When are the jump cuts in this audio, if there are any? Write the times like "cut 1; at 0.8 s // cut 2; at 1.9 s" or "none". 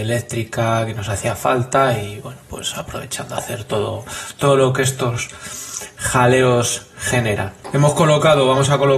none